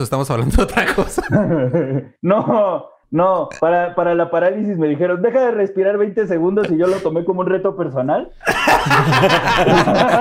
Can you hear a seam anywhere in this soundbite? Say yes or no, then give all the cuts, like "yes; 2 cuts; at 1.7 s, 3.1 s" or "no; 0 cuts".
yes; 1 cut; at 2.2 s